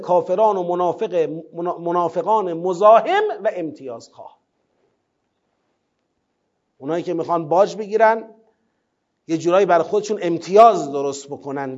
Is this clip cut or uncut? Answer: uncut